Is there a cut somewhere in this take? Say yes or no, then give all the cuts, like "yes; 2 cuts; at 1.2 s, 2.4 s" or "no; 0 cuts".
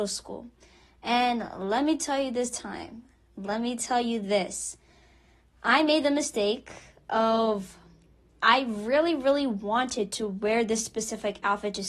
no; 0 cuts